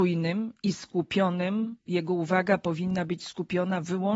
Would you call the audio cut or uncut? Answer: uncut